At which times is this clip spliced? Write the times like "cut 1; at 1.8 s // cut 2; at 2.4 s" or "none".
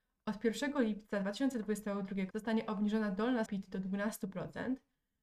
cut 1; at 2.3 s // cut 2; at 3.5 s

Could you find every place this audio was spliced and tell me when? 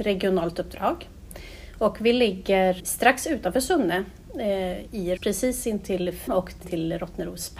cut 1; at 2.8 s // cut 2; at 5.2 s // cut 3; at 6.3 s // cut 4; at 6.6 s

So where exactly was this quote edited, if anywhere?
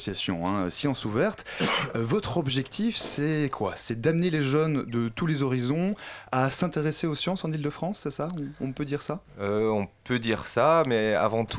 none

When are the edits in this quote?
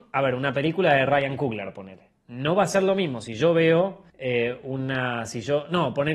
cut 1; at 4.1 s

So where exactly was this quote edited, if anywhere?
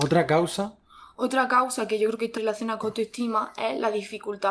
cut 1; at 2.4 s // cut 2; at 2.8 s

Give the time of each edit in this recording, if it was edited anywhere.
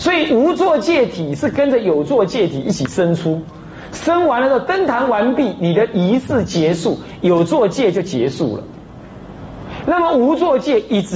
none

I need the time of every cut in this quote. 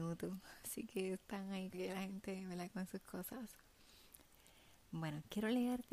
cut 1; at 1.7 s

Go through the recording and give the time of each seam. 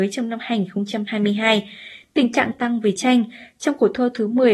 cut 1; at 2.5 s // cut 2; at 3.0 s

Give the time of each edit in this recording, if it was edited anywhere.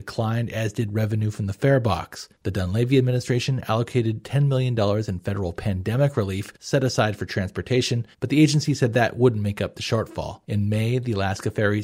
cut 1; at 2.4 s // cut 2; at 6.6 s // cut 3; at 8.1 s // cut 4; at 10.4 s

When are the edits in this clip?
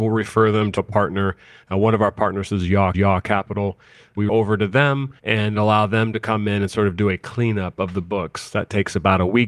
cut 1; at 2.9 s // cut 2; at 4.3 s // cut 3; at 5.2 s

